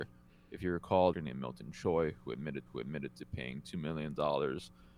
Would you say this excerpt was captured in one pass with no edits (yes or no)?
no